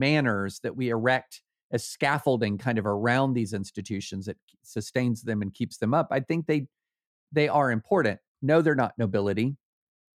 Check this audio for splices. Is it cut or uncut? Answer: uncut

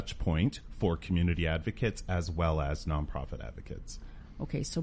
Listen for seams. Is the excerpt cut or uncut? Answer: uncut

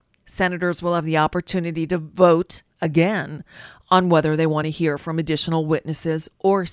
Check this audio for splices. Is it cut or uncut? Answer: uncut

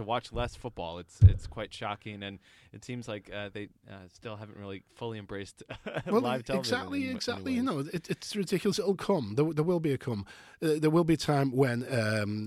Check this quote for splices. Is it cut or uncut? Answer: uncut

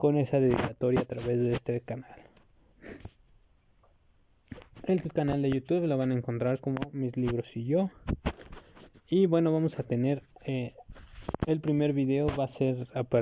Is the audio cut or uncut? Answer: uncut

